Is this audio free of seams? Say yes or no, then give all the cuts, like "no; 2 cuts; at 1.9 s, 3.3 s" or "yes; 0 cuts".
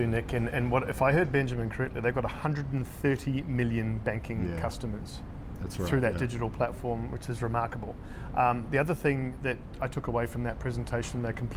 yes; 0 cuts